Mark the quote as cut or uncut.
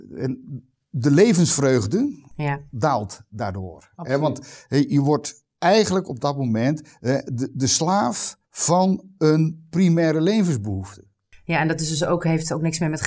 cut